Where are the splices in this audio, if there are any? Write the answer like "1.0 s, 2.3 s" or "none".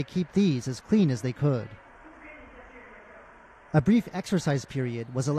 none